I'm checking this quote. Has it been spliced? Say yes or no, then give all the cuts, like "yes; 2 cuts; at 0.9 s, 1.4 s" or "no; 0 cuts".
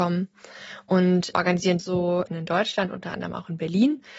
yes; 2 cuts; at 1.8 s, 2.3 s